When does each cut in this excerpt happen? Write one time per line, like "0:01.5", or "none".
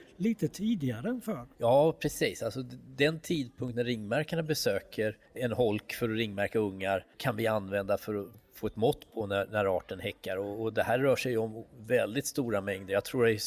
0:01.5
0:05.2
0:07.1